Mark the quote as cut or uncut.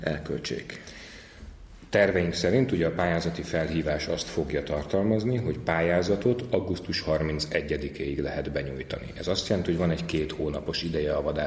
uncut